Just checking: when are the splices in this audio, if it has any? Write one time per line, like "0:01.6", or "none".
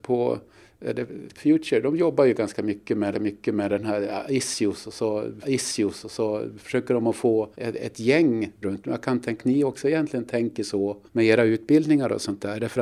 0:01.4
0:03.1
0:05.4
0:07.5
0:08.6
0:09.4
0:11.1